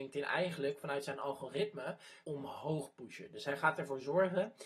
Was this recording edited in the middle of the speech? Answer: yes; 1 cut; at 2.2 s

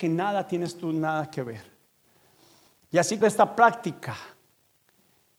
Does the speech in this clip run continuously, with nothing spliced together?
no; 1 cut; at 3.2 s

